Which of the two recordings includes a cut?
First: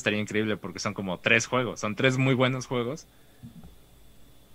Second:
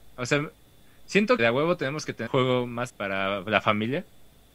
second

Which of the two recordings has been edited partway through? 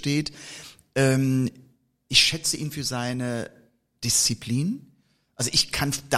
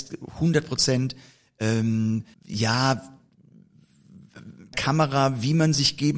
second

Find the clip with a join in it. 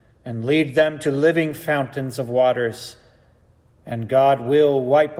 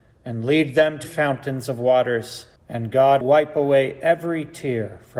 second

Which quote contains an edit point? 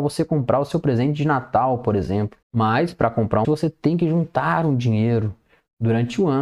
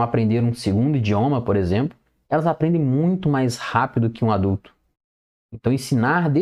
first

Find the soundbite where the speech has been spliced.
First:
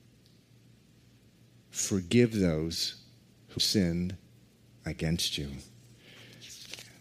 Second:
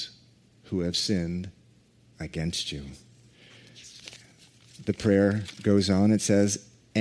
first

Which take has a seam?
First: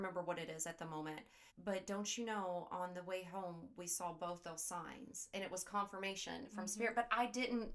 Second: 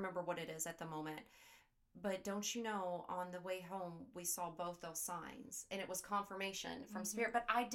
first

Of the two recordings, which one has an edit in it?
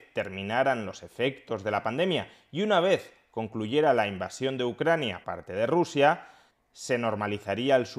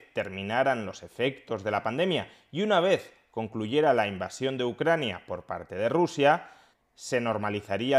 first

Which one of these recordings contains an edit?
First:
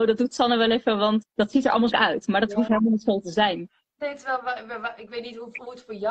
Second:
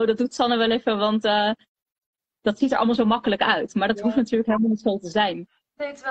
first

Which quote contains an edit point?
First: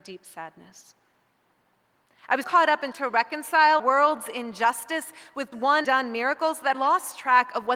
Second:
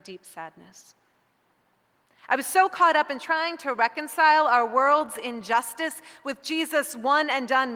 first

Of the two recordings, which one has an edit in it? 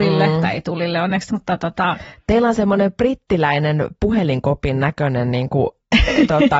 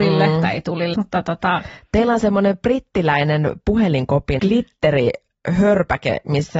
second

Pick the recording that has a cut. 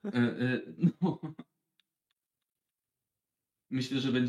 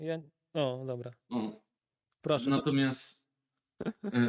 second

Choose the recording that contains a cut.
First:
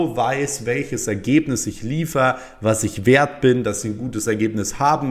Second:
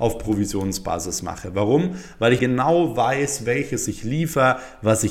second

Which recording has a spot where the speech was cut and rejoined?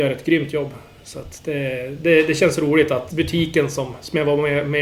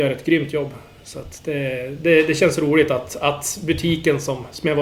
first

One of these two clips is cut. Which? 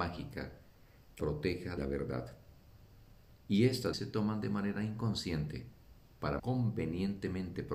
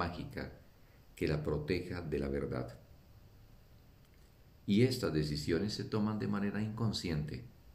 first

